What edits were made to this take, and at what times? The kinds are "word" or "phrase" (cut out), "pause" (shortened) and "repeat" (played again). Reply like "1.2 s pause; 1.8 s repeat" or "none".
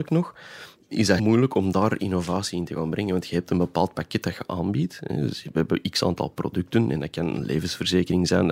1.2 s word